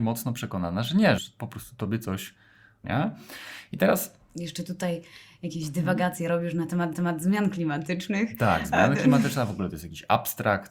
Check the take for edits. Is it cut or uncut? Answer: cut